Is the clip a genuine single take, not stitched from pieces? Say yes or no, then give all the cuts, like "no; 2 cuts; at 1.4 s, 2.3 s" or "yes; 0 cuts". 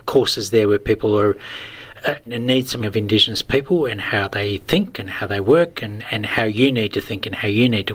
no; 2 cuts; at 2.3 s, 2.8 s